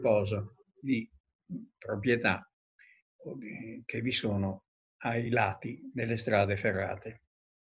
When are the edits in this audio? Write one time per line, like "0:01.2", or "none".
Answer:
none